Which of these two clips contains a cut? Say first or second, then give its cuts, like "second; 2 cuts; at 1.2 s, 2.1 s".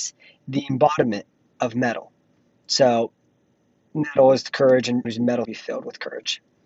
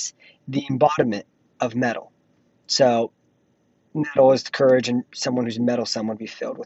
first; 2 cuts; at 5.0 s, 5.4 s